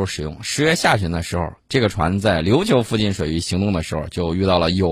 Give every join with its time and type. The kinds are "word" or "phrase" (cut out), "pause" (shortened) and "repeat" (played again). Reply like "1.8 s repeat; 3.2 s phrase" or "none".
1.6 s pause